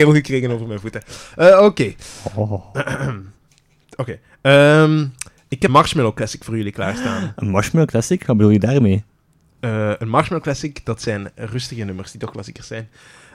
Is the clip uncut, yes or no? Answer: no